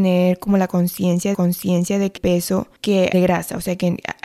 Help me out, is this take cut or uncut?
cut